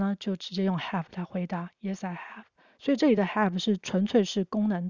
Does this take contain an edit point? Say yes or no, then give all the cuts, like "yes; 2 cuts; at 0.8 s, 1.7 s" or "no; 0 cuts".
no; 0 cuts